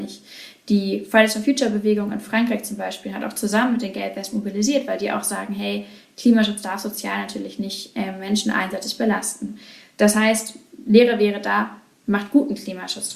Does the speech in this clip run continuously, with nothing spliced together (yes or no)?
yes